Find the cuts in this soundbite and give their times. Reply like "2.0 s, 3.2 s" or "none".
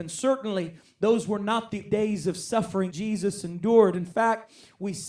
1.8 s, 2.9 s